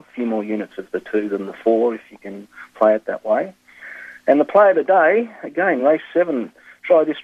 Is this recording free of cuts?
yes; 0 cuts

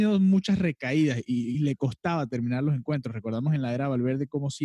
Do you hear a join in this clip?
no; 0 cuts

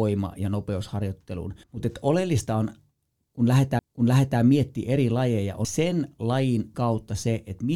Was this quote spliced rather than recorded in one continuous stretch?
yes; 4 cuts; at 1.6 s, 3.8 s, 5.6 s, 6.7 s

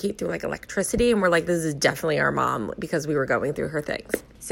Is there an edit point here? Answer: no; 0 cuts

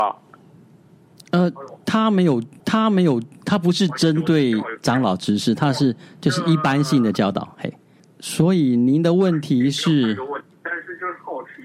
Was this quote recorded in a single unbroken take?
no; 1 cut; at 2.6 s

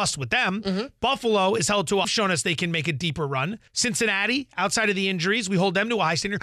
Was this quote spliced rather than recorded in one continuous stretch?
yes; 2 cuts; at 2.0 s, 3.7 s

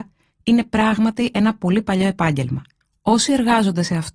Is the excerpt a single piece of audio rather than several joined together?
yes; 0 cuts

